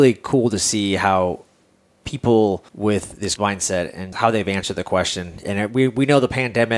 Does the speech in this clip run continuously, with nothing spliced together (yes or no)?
no